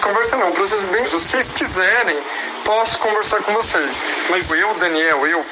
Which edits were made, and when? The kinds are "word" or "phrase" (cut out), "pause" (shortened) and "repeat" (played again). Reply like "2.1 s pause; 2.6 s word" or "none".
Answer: 1.0 s word; 4.5 s word